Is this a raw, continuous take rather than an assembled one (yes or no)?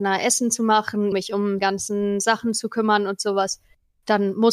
no